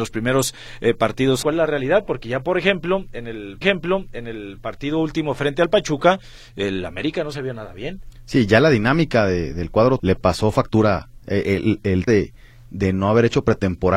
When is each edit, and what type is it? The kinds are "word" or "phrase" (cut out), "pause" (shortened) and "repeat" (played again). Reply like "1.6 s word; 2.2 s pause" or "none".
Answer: 1.4 s phrase; 3.6 s repeat; 10.0 s word; 11.2 s pause; 12.1 s word